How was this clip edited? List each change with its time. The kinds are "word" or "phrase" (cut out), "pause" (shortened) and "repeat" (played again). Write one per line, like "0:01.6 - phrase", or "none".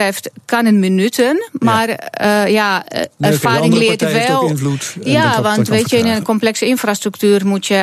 none